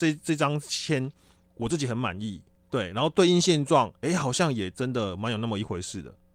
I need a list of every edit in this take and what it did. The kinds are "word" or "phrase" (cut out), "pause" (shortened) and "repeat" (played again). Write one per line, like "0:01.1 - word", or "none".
0:02.6 - pause